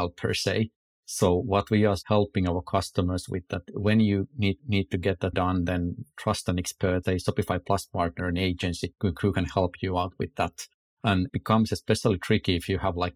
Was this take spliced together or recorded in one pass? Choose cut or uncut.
cut